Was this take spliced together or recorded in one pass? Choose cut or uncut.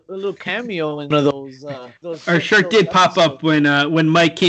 cut